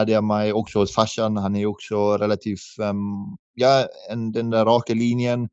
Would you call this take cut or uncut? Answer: cut